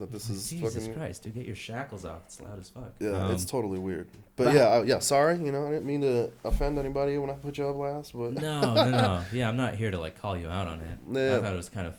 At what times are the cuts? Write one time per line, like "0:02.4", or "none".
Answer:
none

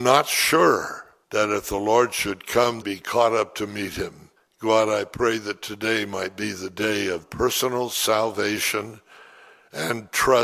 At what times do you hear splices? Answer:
0:01.2
0:02.8
0:04.4
0:07.2

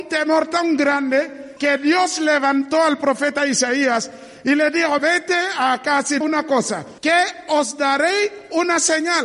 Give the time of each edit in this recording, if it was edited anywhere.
0:01.6
0:05.0
0:06.2
0:07.0

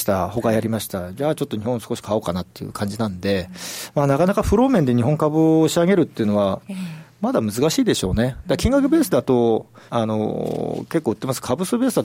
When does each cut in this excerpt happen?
0:09.9

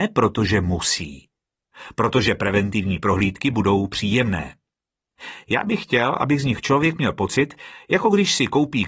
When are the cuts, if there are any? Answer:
none

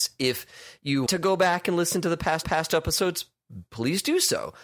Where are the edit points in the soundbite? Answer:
0:01.1
0:02.4

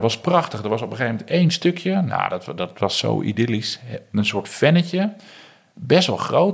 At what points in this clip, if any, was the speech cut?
none

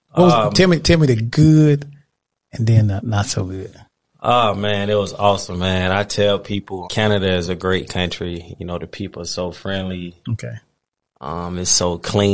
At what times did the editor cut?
0:03.0
0:03.9
0:06.8

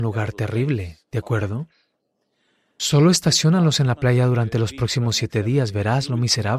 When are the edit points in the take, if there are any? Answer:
none

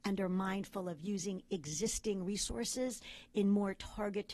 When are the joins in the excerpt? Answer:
none

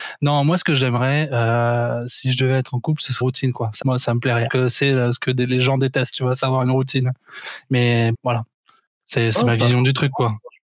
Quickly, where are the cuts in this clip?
0:03.2
0:03.8
0:04.5
0:08.1

